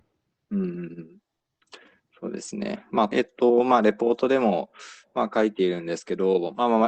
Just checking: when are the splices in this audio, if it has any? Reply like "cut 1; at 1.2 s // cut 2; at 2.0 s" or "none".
cut 1; at 3.1 s